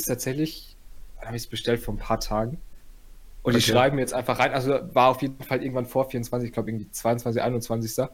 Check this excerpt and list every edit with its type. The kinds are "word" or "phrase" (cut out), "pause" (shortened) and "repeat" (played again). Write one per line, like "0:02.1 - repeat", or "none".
none